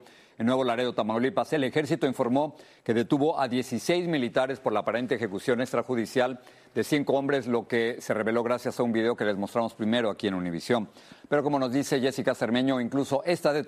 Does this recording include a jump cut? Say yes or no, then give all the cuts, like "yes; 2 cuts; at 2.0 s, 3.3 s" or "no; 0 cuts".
no; 0 cuts